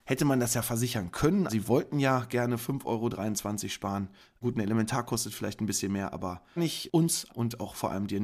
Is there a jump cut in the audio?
yes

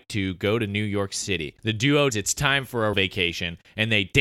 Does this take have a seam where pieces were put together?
yes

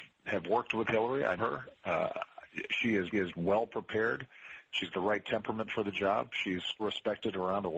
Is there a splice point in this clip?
yes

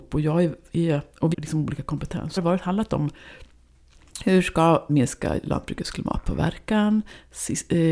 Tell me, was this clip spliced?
yes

